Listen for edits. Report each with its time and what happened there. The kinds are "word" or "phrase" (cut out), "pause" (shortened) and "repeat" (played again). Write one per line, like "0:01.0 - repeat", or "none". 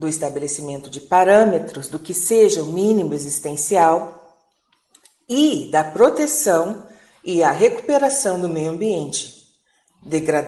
none